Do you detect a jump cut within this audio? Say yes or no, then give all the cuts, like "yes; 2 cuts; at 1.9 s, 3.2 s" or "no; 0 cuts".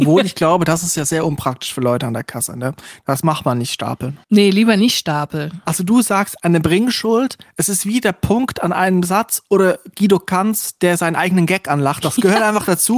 yes; 1 cut; at 4.2 s